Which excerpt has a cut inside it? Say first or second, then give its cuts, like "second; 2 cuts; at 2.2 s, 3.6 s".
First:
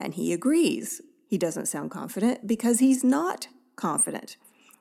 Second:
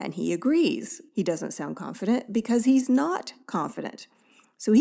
second; 2 cuts; at 1.1 s, 3.4 s